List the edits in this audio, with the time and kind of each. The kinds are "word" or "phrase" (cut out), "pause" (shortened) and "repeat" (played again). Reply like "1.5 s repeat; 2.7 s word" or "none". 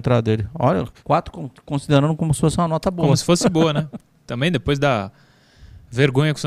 1.0 s pause